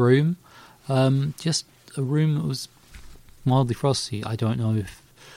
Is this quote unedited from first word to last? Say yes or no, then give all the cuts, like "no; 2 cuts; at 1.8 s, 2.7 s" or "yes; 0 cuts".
yes; 0 cuts